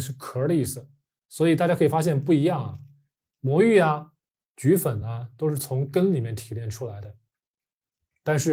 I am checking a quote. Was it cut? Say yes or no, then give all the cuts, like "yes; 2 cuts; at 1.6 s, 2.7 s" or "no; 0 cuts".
no; 0 cuts